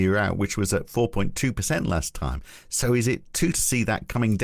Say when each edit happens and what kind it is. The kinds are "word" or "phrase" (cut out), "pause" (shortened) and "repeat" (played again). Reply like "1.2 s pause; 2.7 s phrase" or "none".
3.5 s word